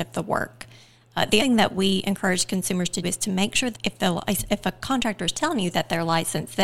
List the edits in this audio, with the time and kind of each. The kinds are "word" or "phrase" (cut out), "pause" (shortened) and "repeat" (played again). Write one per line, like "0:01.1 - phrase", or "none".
0:01.4 - word
0:03.0 - word
0:03.7 - word